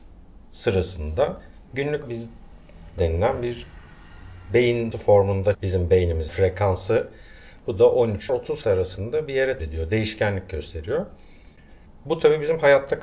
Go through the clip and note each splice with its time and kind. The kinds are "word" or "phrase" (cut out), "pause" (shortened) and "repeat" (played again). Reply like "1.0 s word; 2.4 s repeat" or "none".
2.0 s word; 3.0 s word; 4.9 s word; 5.5 s word; 6.3 s word; 8.3 s word; 8.6 s word; 9.6 s word